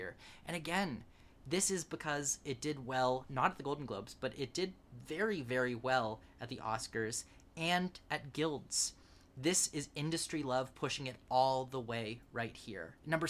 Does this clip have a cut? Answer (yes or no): no